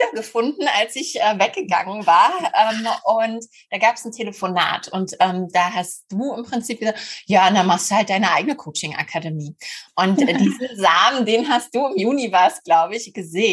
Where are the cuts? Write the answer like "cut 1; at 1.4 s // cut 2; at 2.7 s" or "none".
none